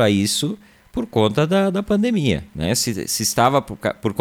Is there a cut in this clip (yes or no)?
no